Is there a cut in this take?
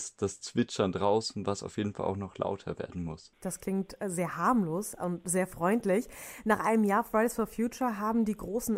yes; 1 cut; at 3.3 s

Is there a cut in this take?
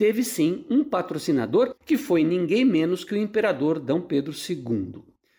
yes; 1 cut; at 1.8 s

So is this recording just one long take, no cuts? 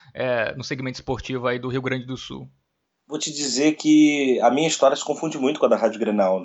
yes; 0 cuts

